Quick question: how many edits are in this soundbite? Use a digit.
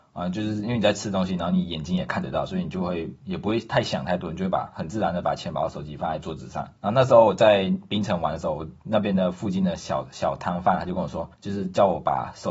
2